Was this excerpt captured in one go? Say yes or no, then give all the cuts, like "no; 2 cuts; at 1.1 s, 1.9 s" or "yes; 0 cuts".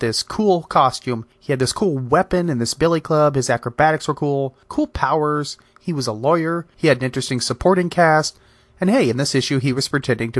yes; 0 cuts